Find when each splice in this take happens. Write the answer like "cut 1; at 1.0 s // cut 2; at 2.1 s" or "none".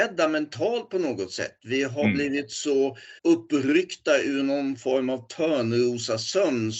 cut 1; at 3.2 s